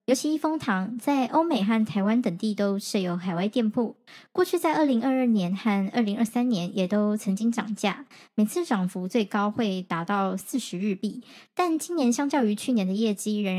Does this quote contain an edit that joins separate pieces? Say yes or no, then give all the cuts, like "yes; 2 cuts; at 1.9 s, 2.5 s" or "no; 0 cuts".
no; 0 cuts